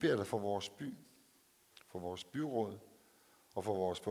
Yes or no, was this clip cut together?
no